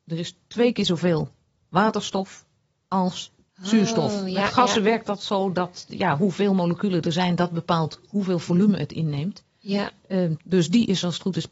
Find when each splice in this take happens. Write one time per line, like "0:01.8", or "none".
none